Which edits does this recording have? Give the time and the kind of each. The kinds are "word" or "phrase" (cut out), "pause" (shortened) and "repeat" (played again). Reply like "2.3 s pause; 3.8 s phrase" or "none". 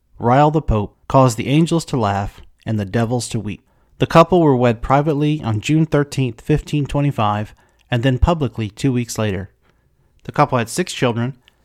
1.0 s pause

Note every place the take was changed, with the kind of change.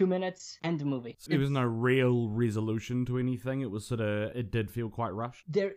1.3 s word; 4.3 s word

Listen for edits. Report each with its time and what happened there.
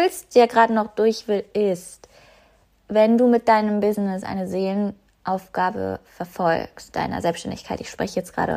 6.9 s word

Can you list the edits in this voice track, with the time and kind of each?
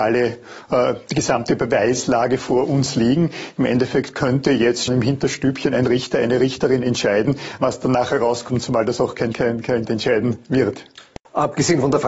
4.9 s word; 9.3 s phrase; 9.9 s word

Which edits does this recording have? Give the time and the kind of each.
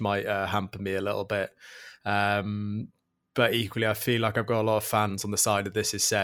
none

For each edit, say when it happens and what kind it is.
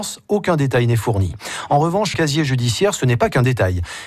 2.1 s word

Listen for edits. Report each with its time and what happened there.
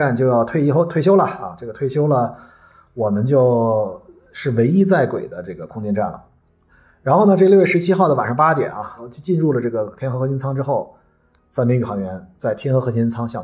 none

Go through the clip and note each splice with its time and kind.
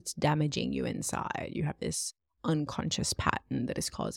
none

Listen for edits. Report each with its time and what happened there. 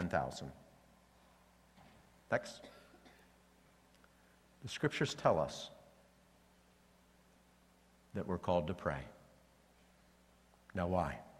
none

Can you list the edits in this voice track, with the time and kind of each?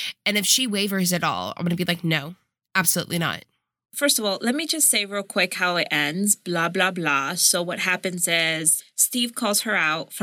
none

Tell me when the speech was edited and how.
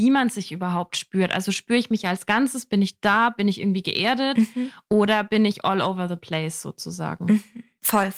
none

